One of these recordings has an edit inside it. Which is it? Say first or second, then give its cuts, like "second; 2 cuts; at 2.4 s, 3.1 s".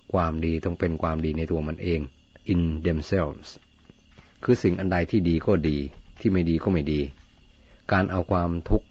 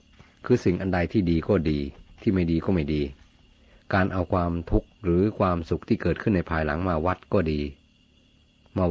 first; 1 cut; at 2.5 s